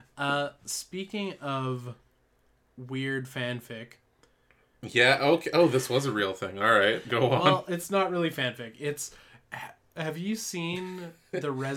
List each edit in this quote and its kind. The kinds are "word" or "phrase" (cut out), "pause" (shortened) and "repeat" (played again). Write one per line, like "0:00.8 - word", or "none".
none